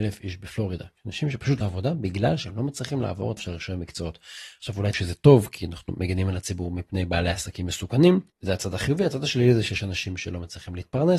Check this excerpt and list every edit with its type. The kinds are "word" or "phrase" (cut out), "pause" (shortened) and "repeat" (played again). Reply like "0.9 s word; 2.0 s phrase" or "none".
1.0 s pause; 1.6 s phrase; 3.4 s word; 4.9 s word; 8.3 s pause

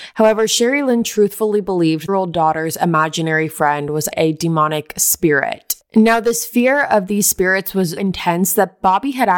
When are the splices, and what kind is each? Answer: 2.1 s phrase; 4.1 s word; 8.0 s word

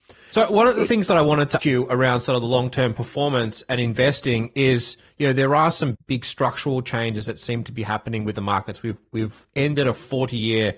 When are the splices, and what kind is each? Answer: 1.6 s word; 5.9 s word

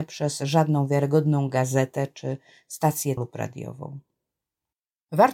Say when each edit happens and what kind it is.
3.2 s word

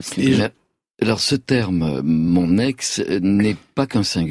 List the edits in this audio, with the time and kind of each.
none

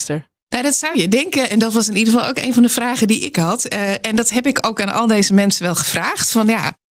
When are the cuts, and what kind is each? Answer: none

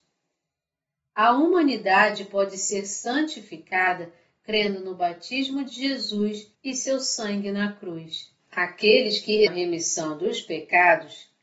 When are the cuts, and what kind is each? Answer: 6.5 s pause; 8.4 s pause; 9.5 s word

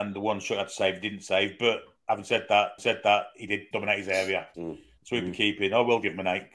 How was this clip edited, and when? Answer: 2.8 s repeat; 3.7 s word; 4.5 s word

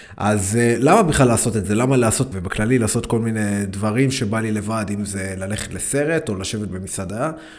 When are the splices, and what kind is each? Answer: 2.3 s phrase

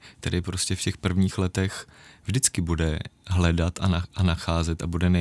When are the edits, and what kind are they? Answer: none

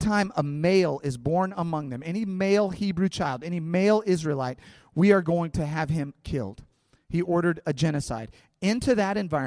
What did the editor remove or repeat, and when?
none

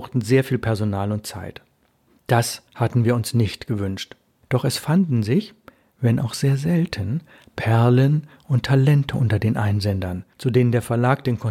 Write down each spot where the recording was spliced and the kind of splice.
2.7 s pause

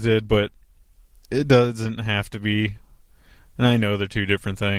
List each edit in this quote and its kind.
none

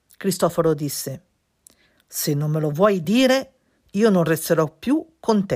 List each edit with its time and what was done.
none

